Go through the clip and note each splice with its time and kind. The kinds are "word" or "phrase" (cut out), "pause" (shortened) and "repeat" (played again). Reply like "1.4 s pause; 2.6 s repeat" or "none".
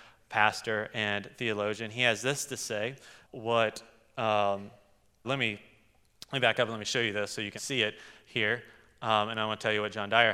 3.2 s word; 5.2 s word; 7.6 s word

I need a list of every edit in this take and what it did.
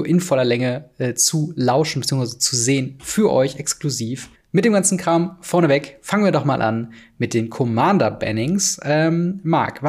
4.4 s pause

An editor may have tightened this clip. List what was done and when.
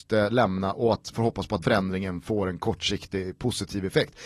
1.1 s word; 1.6 s word

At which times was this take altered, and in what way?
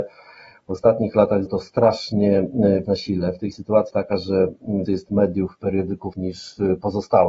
1.5 s word; 2.8 s word; 3.5 s word; 3.9 s word; 4.9 s word; 6.1 s word

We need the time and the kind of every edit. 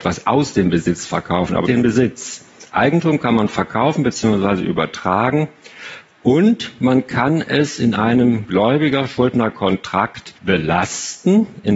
1.6 s word; 10.4 s pause

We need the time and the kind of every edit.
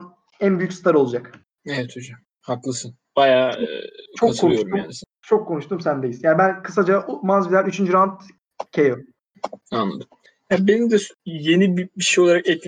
4.1 s pause; 9.6 s pause; 11.1 s pause

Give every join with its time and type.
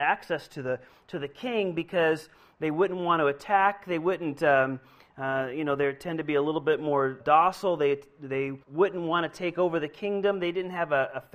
7.2 s word; 8.6 s pause

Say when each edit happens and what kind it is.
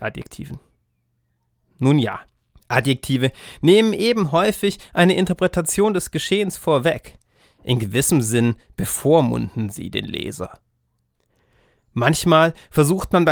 none

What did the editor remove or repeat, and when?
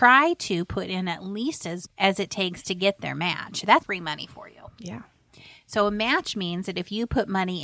1.9 s word; 3.8 s word

